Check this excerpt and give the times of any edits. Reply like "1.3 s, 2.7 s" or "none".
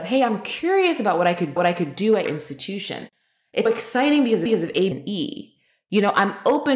1.6 s, 2.3 s, 3.7 s, 4.5 s, 4.9 s